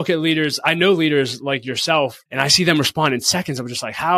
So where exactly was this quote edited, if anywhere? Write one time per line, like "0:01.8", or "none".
0:02.3